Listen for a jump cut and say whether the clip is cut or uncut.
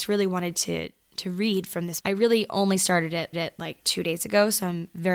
cut